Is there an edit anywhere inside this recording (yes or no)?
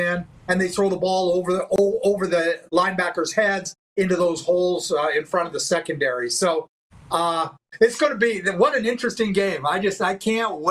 no